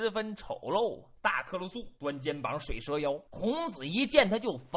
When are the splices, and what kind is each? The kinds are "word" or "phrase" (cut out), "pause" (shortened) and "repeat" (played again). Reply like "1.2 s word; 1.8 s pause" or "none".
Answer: 1.2 s pause; 2.0 s pause; 3.3 s pause

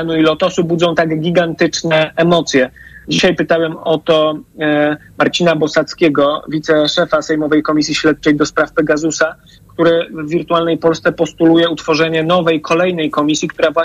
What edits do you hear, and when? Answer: none

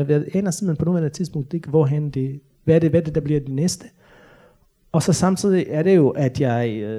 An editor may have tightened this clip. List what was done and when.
none

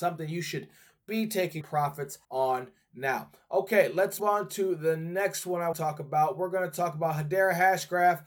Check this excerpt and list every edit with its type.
1.6 s word; 2.2 s pause; 4.2 s word; 5.7 s word

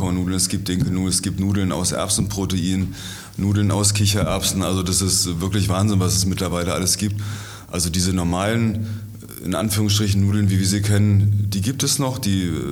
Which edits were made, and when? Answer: none

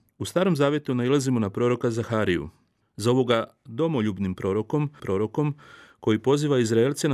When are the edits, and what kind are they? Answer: 5.0 s repeat

